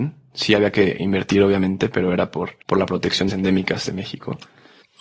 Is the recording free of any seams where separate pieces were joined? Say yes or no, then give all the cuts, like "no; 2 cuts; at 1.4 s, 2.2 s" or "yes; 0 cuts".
no; 2 cuts; at 2.6 s, 3.3 s